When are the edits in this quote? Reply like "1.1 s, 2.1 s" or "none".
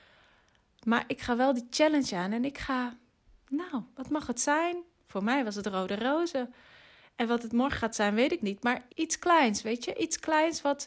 8.4 s, 8.9 s